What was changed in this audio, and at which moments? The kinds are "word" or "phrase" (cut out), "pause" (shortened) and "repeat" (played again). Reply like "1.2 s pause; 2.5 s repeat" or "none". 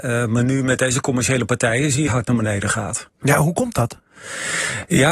2.1 s phrase